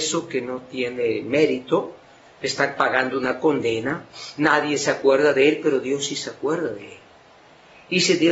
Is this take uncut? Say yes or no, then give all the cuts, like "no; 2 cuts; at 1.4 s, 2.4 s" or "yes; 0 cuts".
yes; 0 cuts